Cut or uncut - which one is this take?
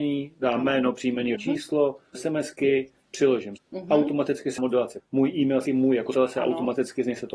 cut